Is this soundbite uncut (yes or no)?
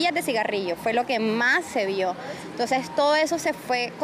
yes